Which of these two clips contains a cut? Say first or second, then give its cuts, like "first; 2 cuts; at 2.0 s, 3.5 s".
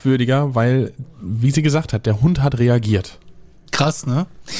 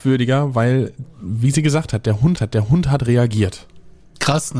second; 1 cut; at 2.4 s